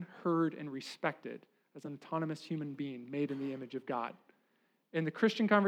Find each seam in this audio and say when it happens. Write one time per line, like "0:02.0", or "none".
none